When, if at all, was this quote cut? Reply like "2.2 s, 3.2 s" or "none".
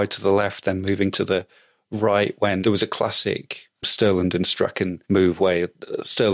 1.1 s, 2.6 s, 5.0 s